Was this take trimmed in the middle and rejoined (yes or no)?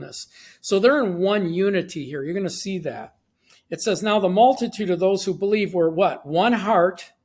no